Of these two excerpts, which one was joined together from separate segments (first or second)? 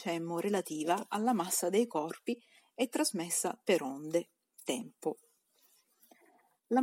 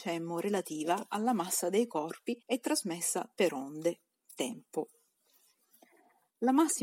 second